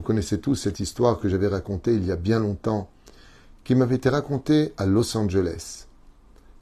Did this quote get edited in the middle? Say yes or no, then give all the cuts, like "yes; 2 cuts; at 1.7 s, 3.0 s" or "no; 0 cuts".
no; 0 cuts